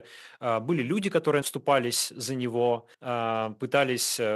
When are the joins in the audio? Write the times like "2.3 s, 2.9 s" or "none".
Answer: 1.4 s, 2.9 s